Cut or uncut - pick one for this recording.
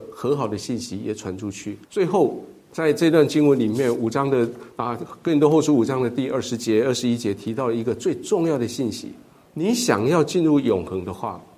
cut